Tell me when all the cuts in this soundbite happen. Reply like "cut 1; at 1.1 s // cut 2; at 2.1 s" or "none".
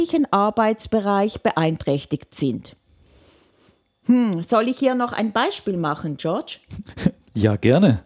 none